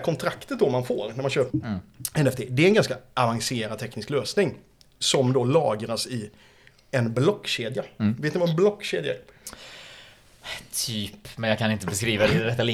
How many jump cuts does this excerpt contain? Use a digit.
1